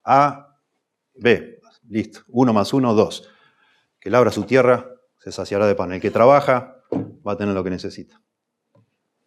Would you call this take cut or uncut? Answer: uncut